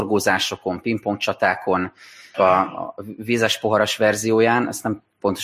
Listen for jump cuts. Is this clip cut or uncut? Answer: cut